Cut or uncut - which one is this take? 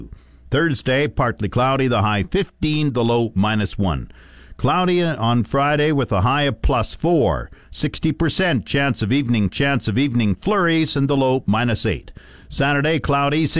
cut